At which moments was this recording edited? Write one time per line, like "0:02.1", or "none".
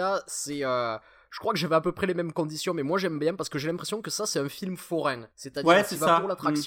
0:05.3